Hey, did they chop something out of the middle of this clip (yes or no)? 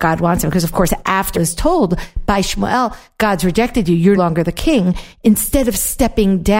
yes